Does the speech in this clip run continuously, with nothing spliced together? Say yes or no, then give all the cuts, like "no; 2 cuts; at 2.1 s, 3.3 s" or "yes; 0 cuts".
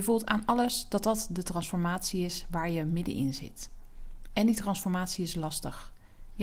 yes; 0 cuts